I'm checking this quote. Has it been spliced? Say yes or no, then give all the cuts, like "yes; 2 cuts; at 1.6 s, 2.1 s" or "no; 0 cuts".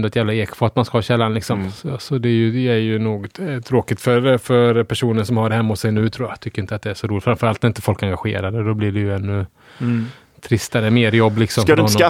no; 0 cuts